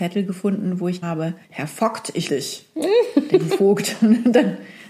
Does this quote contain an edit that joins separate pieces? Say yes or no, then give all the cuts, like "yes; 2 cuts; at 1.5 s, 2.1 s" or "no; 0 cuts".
yes; 4 cuts; at 1.0 s, 1.4 s, 2.3 s, 3.5 s